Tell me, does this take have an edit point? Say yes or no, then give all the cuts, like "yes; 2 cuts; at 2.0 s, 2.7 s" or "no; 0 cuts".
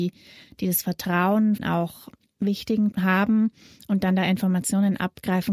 yes; 2 cuts; at 1.6 s, 2.9 s